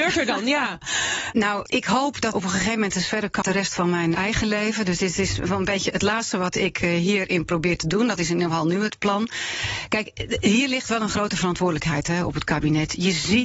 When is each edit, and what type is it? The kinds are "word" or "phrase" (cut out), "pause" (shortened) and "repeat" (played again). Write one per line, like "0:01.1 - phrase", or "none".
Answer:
0:01.3 - word
0:01.7 - word
0:02.3 - phrase
0:03.4 - word
0:04.1 - word